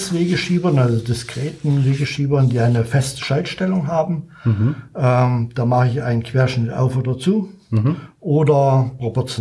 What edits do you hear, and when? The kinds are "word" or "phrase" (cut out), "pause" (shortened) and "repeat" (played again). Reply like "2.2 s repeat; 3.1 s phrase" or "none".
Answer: none